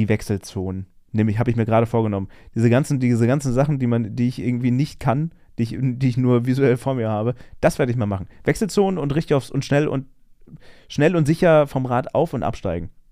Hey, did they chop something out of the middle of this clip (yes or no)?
no